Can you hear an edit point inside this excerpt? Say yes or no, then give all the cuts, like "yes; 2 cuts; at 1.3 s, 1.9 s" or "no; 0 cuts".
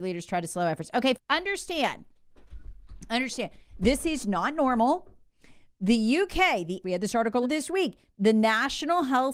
yes; 3 cuts; at 1.1 s, 6.8 s, 7.4 s